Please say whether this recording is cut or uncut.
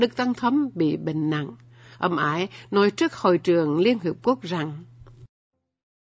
uncut